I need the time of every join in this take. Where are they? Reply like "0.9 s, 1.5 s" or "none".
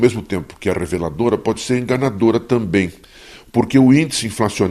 none